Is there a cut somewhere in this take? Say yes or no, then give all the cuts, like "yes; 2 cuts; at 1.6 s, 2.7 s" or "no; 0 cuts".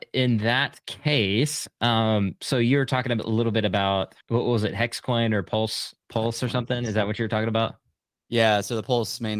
yes; 2 cuts; at 4.2 s, 6.0 s